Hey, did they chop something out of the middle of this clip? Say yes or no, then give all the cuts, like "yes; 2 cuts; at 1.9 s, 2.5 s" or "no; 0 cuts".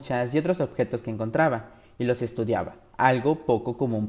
no; 0 cuts